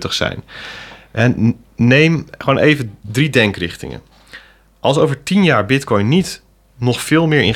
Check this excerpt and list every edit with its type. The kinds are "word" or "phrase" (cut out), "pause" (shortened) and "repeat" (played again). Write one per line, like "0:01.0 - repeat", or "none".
none